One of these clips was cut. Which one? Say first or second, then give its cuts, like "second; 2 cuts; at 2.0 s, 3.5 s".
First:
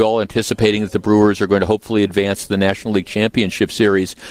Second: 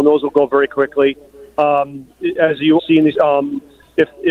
second; 3 cuts; at 2.4 s, 2.8 s, 3.2 s